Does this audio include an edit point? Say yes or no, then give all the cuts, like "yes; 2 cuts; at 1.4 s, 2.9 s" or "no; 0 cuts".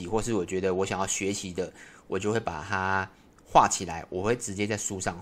no; 0 cuts